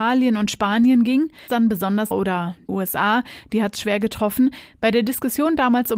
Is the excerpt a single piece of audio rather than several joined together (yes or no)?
no